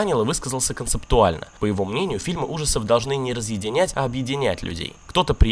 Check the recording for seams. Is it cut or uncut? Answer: uncut